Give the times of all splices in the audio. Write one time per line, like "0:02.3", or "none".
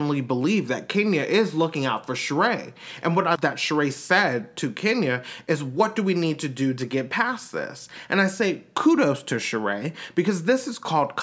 0:03.4